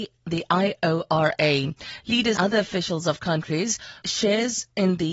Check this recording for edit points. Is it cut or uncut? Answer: cut